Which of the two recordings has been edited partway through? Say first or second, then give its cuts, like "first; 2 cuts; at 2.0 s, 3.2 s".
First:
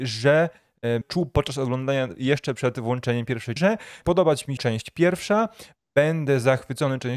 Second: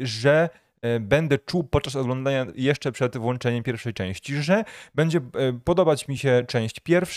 first; 4 cuts; at 1.0 s, 3.6 s, 4.0 s, 4.6 s